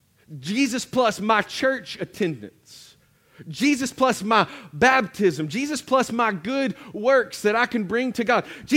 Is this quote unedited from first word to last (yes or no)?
yes